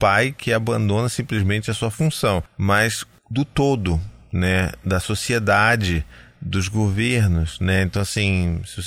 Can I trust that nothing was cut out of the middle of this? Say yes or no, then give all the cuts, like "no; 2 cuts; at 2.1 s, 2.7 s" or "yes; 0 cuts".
yes; 0 cuts